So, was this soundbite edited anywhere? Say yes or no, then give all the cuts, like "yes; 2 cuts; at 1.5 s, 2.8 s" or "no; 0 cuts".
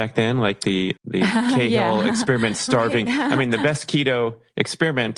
yes; 1 cut; at 1.0 s